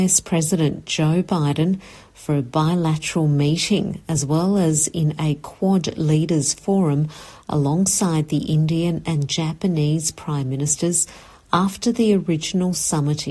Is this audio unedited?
yes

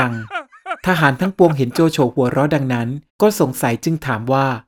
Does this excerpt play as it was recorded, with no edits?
no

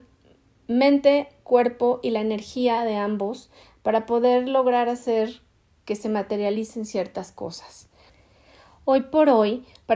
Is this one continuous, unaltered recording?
yes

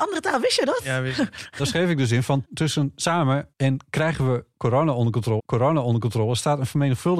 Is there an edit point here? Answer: yes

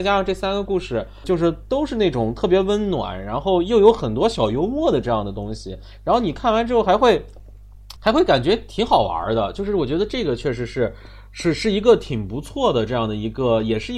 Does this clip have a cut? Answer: yes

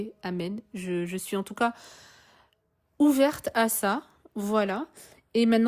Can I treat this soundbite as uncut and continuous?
yes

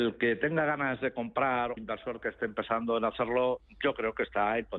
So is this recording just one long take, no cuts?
no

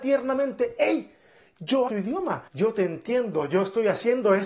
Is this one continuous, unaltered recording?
no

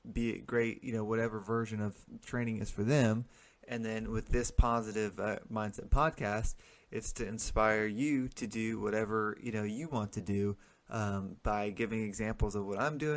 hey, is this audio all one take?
yes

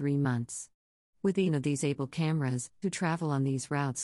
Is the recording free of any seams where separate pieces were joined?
no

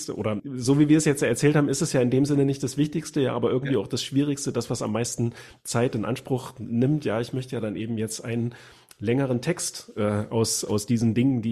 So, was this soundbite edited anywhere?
no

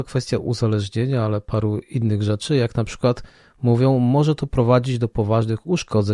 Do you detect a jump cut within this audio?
no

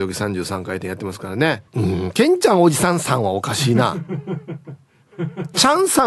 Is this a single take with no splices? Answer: no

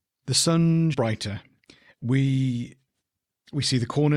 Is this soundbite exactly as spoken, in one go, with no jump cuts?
no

